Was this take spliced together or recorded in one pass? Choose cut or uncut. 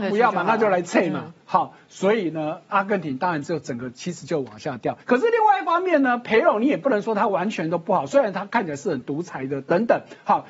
cut